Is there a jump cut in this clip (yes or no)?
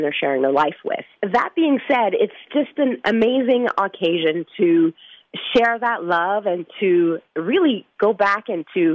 no